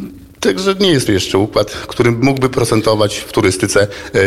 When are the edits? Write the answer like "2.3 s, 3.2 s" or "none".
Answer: 1.1 s